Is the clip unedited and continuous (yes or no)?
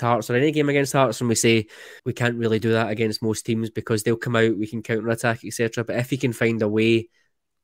no